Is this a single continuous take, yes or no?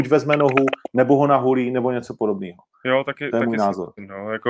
yes